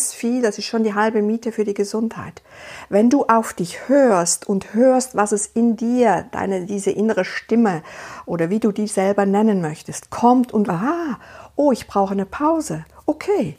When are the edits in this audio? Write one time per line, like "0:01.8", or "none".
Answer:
0:10.7